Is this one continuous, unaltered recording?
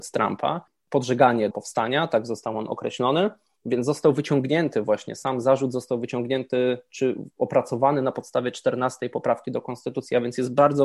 no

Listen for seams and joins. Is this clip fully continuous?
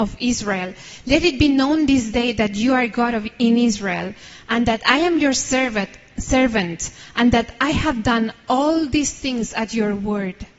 yes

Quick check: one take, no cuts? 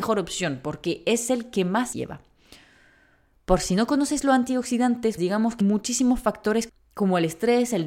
no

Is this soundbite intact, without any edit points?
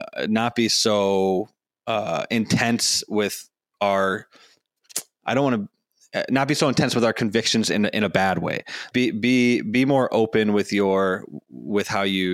no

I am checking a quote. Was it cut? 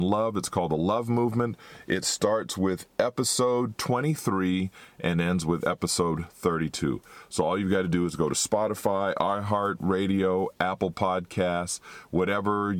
no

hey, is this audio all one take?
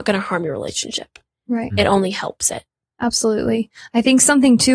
yes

